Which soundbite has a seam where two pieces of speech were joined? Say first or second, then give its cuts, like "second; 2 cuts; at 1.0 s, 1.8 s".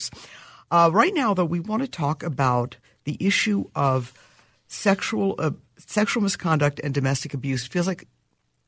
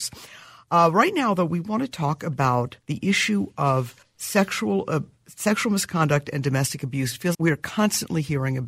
second; 3 cuts; at 2.8 s, 4.0 s, 7.3 s